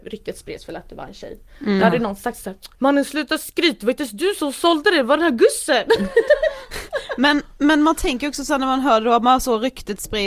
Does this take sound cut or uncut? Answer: cut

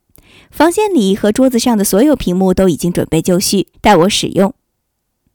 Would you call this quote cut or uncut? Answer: cut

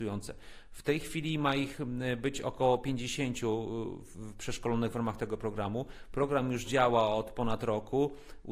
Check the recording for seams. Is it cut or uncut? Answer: uncut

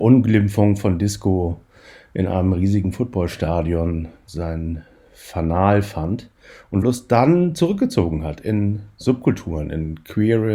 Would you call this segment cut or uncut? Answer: cut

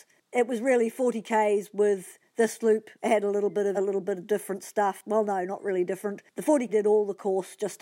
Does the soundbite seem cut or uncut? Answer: cut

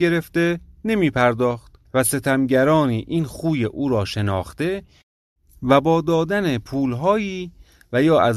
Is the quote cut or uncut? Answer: cut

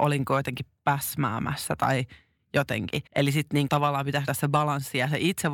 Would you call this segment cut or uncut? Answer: cut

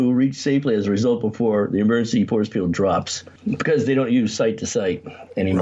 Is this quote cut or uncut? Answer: uncut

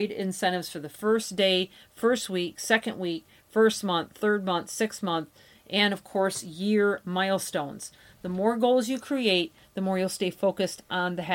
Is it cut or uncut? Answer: uncut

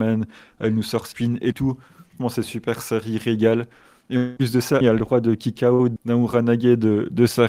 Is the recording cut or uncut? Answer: cut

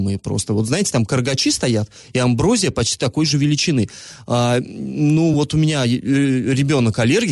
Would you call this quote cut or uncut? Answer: uncut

